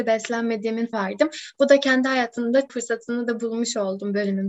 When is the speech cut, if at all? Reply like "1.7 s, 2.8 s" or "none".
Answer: 0.9 s, 2.7 s